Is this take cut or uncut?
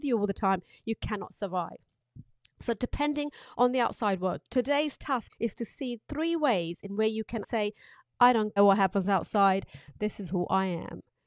cut